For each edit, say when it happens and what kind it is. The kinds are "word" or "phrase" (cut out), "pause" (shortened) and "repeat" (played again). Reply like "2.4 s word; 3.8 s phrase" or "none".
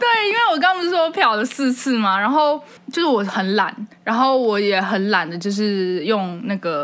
2.8 s pause; 3.9 s pause